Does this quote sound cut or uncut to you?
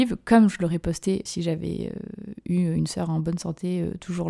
cut